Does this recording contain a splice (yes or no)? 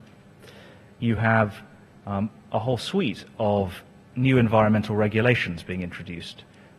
no